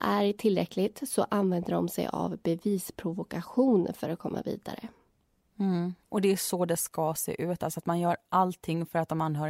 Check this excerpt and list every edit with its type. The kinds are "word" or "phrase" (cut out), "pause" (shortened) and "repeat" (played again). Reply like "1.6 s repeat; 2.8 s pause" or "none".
6.0 s pause